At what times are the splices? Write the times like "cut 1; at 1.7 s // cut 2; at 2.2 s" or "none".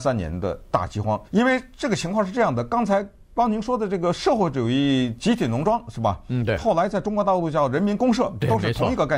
cut 1; at 1.3 s